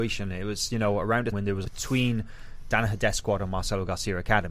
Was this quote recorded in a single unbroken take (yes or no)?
no